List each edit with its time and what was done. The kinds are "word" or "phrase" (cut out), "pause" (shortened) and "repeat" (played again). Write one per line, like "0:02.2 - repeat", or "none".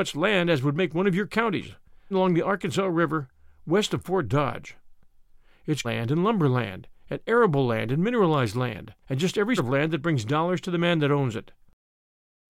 0:02.1 - word
0:05.8 - word
0:09.0 - pause
0:09.6 - word